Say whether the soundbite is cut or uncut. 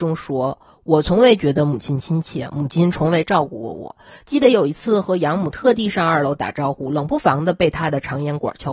uncut